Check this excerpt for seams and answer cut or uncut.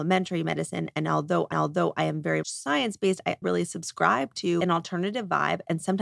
cut